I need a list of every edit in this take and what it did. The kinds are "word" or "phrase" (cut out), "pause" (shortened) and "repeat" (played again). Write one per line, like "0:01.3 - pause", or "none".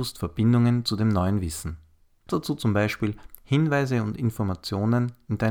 0:02.3 - word

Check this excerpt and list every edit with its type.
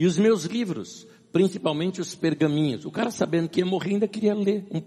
none

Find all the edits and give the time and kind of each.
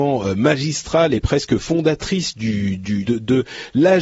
0:03.1 - word

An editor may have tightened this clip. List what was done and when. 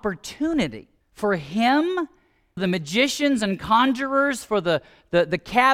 0:01.0 - pause
0:02.6 - word

